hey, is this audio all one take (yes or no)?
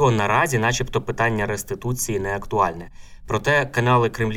yes